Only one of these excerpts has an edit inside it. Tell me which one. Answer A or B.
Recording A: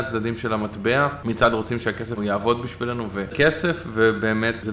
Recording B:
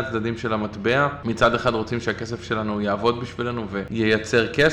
A